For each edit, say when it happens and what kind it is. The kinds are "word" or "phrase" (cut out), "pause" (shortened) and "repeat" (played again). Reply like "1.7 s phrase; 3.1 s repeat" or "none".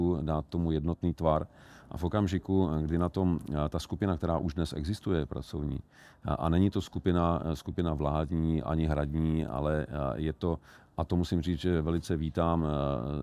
none